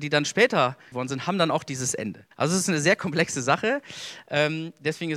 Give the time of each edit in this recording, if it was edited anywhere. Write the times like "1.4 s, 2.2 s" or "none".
0.9 s, 2.3 s